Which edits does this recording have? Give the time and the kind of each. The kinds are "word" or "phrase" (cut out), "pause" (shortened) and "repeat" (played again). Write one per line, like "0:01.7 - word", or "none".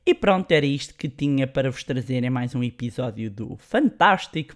none